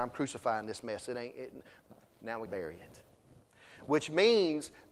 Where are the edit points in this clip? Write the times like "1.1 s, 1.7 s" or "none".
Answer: 2.5 s